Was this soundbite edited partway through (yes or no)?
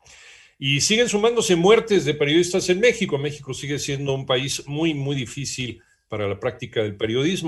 no